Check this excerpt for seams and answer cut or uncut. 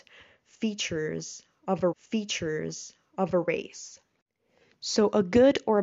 cut